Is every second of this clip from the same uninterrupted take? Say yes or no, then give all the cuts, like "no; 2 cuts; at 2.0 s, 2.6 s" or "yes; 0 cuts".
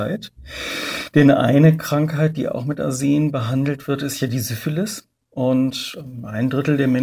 yes; 0 cuts